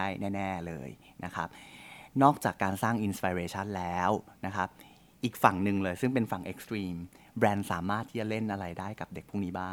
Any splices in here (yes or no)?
no